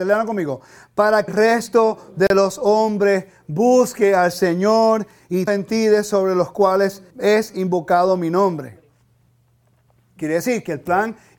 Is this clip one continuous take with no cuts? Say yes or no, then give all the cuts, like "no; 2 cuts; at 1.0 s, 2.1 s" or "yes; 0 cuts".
no; 3 cuts; at 1.3 s, 5.5 s, 7.1 s